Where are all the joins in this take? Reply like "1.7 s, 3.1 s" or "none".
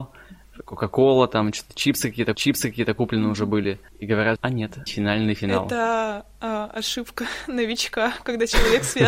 2.3 s, 3.9 s, 4.4 s, 4.9 s